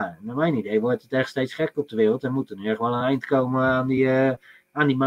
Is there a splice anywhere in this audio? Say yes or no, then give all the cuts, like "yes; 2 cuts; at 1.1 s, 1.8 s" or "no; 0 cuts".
no; 0 cuts